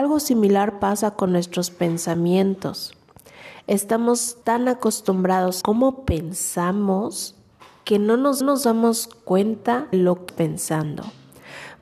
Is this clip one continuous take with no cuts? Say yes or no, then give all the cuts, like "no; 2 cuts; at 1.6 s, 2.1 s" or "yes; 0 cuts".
no; 7 cuts; at 1.3 s, 4.4 s, 5.6 s, 7.6 s, 8.4 s, 9.9 s, 10.3 s